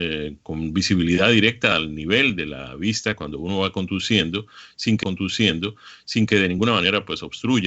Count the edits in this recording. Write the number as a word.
one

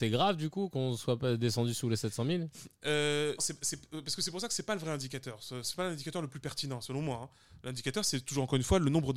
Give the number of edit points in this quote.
one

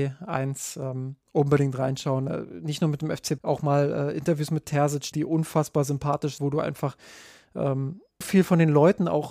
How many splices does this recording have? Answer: five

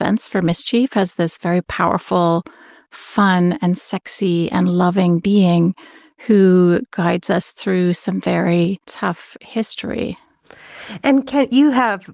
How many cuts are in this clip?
one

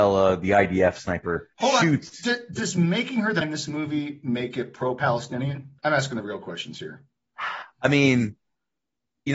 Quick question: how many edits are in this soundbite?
three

